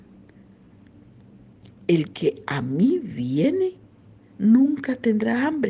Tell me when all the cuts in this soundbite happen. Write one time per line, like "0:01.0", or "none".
none